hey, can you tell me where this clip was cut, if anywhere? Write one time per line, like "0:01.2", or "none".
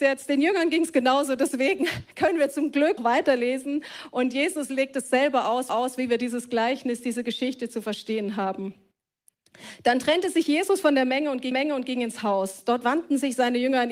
0:03.0
0:05.7
0:11.5